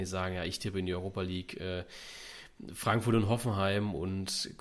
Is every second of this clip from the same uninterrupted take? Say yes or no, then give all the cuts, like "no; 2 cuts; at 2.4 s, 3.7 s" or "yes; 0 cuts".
yes; 0 cuts